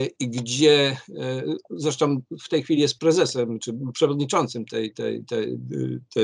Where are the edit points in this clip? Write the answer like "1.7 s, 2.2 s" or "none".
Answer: none